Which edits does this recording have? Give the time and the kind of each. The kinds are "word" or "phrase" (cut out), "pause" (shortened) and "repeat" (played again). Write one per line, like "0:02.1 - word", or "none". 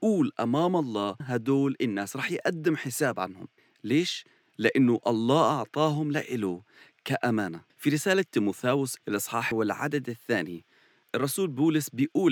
0:01.2 - word
0:03.6 - pause
0:07.7 - pause
0:09.0 - word
0:09.5 - word